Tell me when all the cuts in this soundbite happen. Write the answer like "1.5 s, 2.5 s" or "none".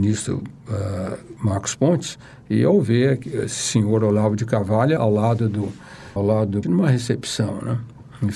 5.0 s, 6.2 s, 6.6 s

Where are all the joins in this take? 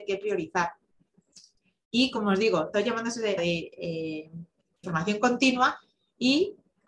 2.7 s, 3.4 s, 4.8 s

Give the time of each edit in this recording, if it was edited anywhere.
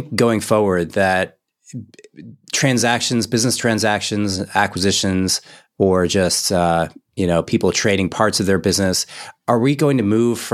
none

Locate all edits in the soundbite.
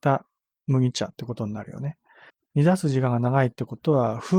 2.3 s

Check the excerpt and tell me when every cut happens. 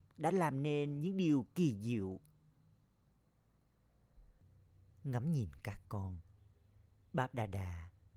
none

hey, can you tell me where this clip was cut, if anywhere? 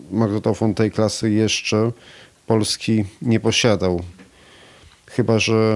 none

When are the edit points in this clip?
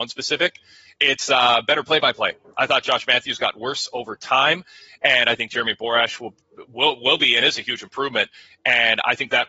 none

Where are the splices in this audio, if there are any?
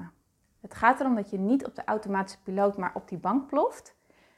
none

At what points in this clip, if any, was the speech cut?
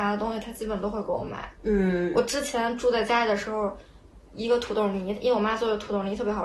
1.5 s

